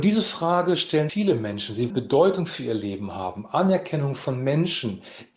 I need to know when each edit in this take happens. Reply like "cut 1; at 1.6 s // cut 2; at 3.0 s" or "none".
cut 1; at 1.1 s // cut 2; at 1.9 s